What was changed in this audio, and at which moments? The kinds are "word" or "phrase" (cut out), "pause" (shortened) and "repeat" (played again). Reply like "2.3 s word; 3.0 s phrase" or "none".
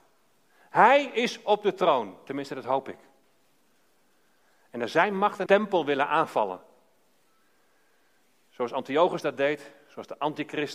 5.5 s phrase